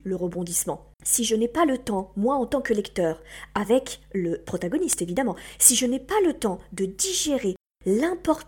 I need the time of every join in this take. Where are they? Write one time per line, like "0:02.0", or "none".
0:00.9